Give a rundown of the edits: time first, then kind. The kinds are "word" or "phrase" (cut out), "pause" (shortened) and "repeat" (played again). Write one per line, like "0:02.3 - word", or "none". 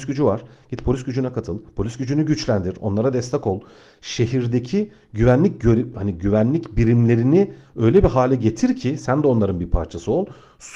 none